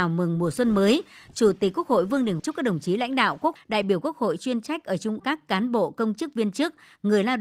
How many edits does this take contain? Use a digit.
3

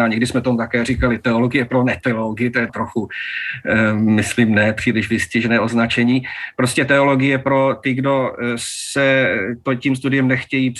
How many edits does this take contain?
1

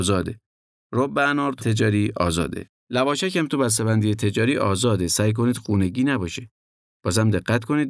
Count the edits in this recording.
2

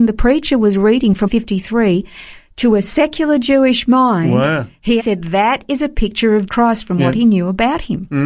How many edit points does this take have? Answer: 3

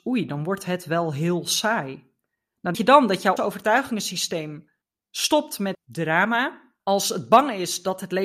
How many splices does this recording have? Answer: 5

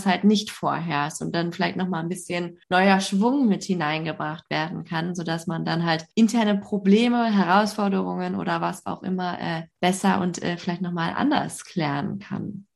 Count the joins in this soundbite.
3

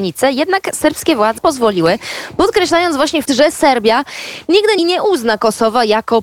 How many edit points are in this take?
3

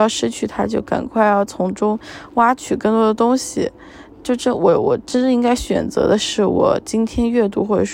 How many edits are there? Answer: 0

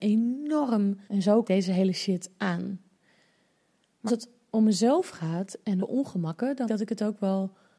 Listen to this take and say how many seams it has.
5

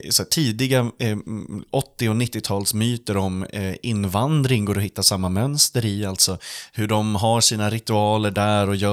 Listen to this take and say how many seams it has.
0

